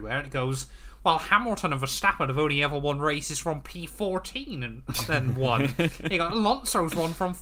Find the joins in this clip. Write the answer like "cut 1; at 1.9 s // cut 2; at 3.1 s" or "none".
none